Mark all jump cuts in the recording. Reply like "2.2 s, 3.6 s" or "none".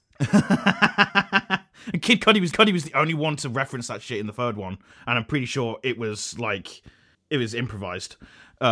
2.5 s, 7.1 s